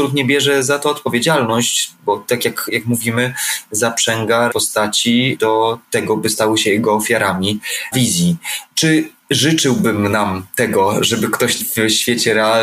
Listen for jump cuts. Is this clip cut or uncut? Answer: cut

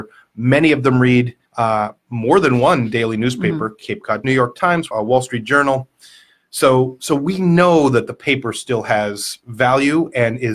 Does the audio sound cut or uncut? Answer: cut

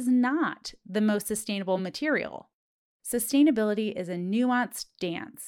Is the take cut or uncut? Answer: uncut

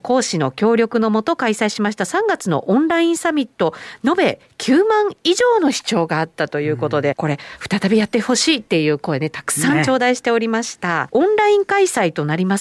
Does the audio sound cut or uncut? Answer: cut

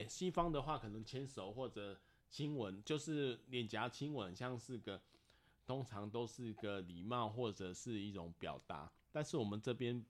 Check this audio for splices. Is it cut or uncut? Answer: uncut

